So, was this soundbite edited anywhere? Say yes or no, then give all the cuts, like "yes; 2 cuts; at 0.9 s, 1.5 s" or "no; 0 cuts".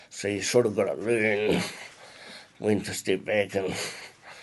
no; 0 cuts